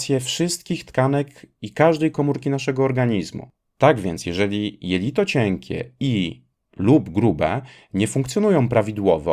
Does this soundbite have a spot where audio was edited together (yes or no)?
no